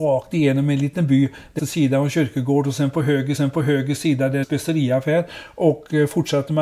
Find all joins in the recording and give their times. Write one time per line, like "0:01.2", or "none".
0:01.6
0:03.4
0:04.4